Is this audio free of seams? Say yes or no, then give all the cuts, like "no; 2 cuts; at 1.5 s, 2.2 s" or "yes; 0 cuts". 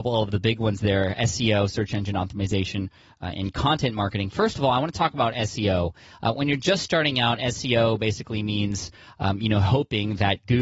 yes; 0 cuts